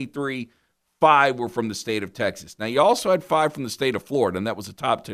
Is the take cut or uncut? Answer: uncut